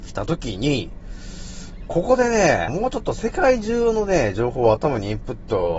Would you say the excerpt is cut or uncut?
cut